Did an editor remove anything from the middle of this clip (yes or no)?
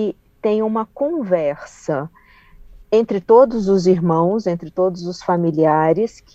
yes